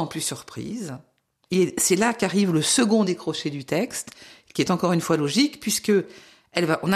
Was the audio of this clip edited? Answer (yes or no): no